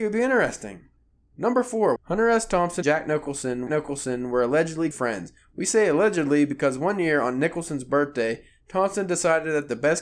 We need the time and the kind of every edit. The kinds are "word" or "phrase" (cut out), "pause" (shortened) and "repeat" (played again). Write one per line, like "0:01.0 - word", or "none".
0:01.0 - pause
0:02.0 - phrase
0:02.8 - word
0:03.7 - repeat
0:04.9 - word